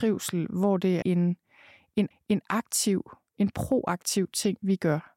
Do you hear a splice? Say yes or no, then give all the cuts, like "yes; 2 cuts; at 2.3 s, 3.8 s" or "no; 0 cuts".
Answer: yes; 2 cuts; at 1.0 s, 2.1 s